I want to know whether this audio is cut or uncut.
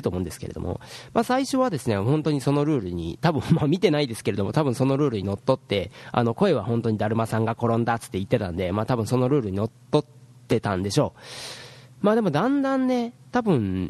uncut